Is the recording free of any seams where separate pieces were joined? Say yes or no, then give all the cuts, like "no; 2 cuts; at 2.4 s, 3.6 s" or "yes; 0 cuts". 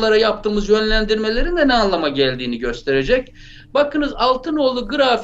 yes; 0 cuts